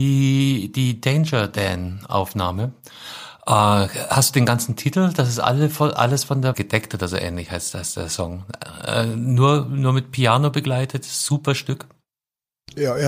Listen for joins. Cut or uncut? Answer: cut